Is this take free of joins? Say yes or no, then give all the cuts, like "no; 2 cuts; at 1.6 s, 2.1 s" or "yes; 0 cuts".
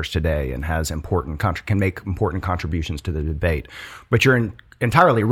yes; 0 cuts